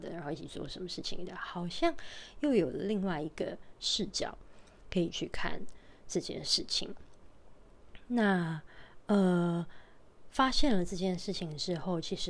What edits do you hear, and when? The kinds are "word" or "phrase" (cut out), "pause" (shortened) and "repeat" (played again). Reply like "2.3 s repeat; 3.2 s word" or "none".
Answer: none